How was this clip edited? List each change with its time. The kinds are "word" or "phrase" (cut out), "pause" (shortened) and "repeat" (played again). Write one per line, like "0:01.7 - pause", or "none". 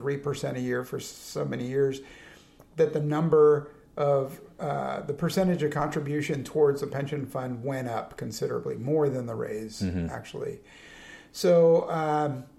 none